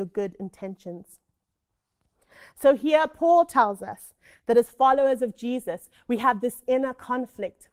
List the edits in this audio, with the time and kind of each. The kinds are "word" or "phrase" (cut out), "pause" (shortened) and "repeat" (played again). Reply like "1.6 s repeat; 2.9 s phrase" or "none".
none